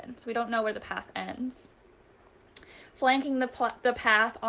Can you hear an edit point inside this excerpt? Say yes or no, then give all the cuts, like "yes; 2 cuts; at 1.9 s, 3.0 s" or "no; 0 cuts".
no; 0 cuts